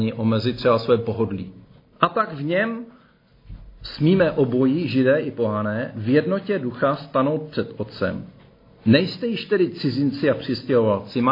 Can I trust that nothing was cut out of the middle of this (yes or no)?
yes